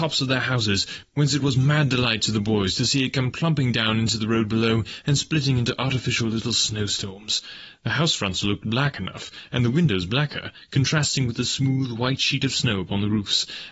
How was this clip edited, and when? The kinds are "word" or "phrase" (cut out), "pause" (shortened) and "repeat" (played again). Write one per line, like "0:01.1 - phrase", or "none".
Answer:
none